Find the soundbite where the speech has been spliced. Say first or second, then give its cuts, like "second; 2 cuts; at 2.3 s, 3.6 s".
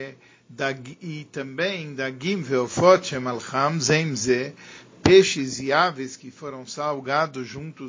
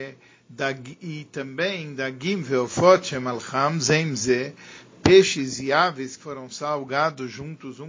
second; 1 cut; at 6.2 s